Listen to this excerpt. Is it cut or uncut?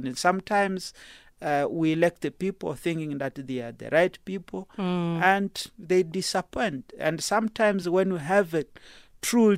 uncut